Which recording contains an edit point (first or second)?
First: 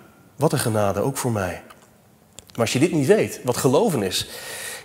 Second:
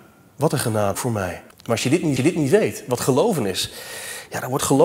second